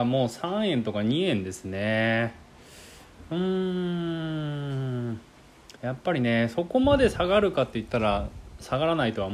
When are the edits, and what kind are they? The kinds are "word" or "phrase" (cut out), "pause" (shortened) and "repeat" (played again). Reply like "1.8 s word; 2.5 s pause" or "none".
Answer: 5.8 s pause